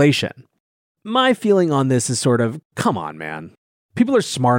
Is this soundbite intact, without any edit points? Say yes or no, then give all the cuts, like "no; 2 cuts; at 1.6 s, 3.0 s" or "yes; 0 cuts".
yes; 0 cuts